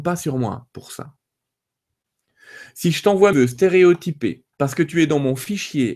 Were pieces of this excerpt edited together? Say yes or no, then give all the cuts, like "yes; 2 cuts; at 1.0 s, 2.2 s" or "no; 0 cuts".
yes; 2 cuts; at 3.3 s, 4.5 s